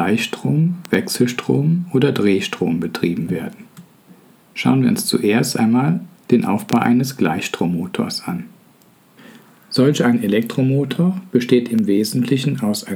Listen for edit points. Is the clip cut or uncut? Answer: uncut